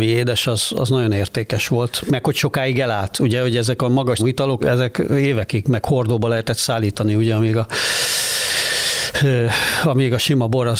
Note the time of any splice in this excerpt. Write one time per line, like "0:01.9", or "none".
0:02.1
0:04.2
0:04.6